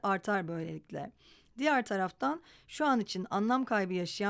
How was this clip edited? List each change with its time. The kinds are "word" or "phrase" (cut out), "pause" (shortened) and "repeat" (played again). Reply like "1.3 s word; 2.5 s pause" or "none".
none